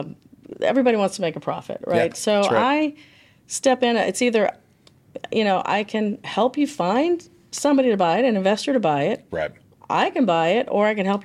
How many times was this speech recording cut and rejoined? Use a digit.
0